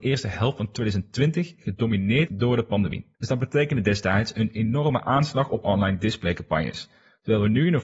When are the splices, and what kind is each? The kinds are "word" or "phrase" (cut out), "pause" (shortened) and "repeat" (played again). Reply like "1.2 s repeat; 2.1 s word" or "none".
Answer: 2.3 s word; 3.1 s pause; 5.6 s phrase